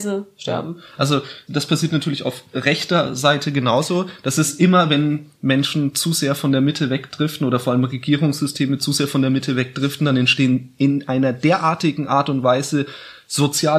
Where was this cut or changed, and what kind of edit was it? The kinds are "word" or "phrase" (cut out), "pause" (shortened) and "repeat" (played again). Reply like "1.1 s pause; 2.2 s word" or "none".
1.5 s word